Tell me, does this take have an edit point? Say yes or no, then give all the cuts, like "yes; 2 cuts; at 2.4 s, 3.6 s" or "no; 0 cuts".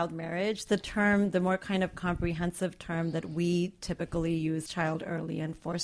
yes; 1 cut; at 4.7 s